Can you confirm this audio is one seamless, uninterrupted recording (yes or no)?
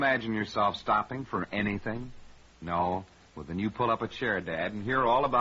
yes